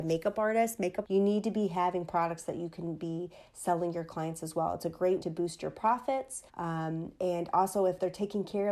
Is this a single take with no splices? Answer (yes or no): no